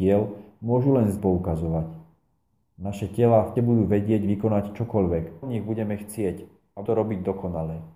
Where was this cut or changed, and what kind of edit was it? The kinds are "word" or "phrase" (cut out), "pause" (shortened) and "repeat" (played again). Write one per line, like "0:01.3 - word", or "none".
0:01.2 - word
0:03.6 - word
0:05.4 - word
0:06.9 - word